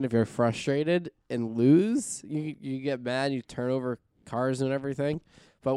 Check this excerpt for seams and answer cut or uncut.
uncut